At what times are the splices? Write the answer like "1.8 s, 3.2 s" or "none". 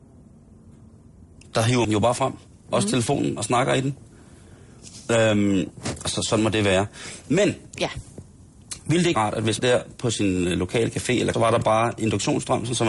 1.8 s, 9.1 s, 9.6 s, 11.3 s